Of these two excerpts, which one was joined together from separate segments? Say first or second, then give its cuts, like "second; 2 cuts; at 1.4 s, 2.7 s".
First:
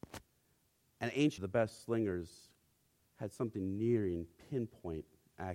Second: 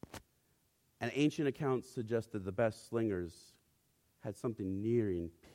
first; 1 cut; at 1.4 s